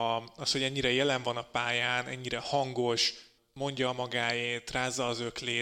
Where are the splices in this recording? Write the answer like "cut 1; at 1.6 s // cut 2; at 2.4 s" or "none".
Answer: cut 1; at 3.4 s